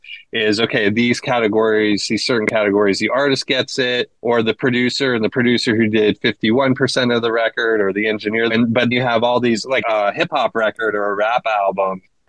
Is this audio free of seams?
no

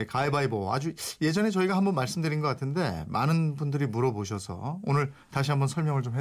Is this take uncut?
yes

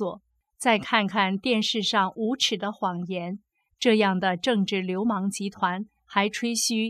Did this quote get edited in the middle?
no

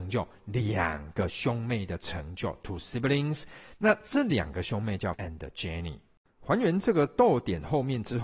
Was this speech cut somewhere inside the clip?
yes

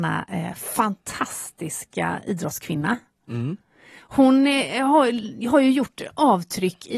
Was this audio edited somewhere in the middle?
no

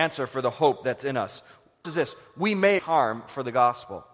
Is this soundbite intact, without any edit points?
no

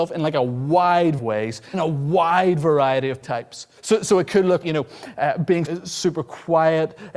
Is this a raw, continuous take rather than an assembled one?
no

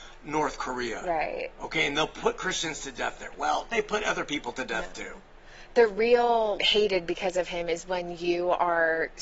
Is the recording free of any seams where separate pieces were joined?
no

